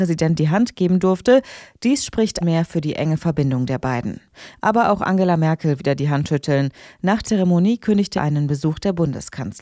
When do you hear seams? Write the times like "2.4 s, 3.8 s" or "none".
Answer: 2.4 s, 5.8 s, 7.2 s, 8.2 s